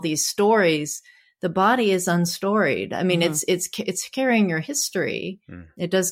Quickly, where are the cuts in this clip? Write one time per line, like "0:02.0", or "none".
none